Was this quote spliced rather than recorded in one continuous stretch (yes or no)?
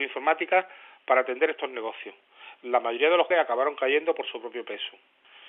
yes